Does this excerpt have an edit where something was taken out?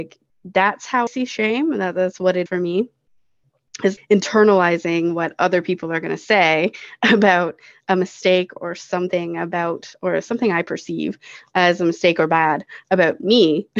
yes; 4 cuts; at 1.1 s, 2.5 s, 4.0 s, 8.6 s

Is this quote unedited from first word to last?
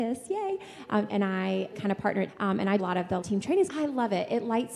no; 6 cuts; at 1.1 s, 1.7 s, 2.3 s, 2.8 s, 3.2 s, 3.7 s

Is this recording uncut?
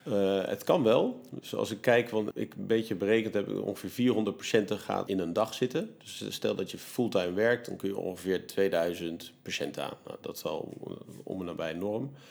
no; 2 cuts; at 2.3 s, 5.1 s

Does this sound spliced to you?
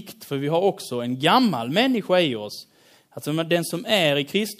no; 0 cuts

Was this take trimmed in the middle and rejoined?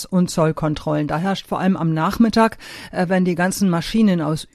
no; 0 cuts

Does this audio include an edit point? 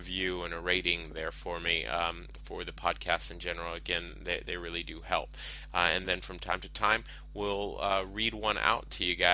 no; 0 cuts

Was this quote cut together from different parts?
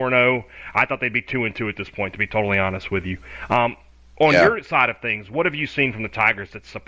no; 0 cuts

